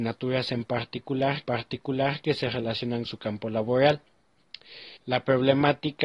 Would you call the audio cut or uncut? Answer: cut